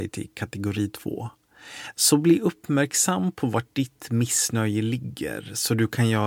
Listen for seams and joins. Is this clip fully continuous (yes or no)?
yes